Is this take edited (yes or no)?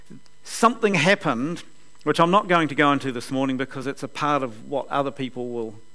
no